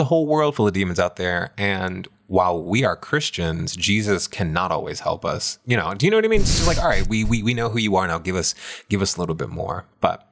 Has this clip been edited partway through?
no; 0 cuts

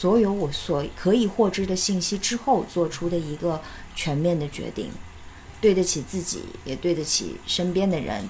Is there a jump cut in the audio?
yes; 1 cut; at 5.6 s

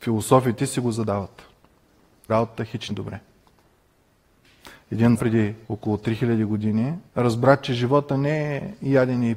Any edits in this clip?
yes; 5 cuts; at 2.3 s, 2.9 s, 5.2 s, 5.6 s, 7.1 s

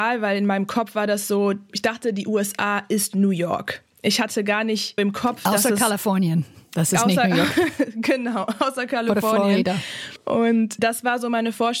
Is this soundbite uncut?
no; 1 cut; at 5.0 s

